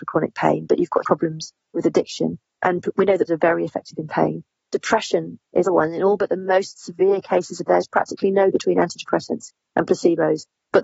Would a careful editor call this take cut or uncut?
cut